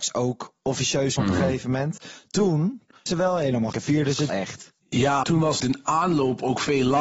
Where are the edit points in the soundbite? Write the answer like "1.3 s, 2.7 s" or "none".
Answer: 1.2 s, 3.1 s, 3.7 s, 4.3 s, 5.2 s, 5.6 s